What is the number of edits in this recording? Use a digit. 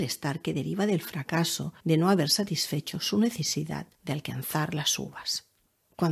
2